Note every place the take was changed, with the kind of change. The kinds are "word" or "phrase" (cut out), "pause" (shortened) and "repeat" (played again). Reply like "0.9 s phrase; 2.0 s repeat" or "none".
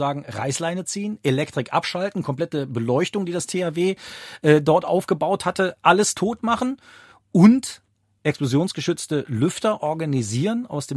none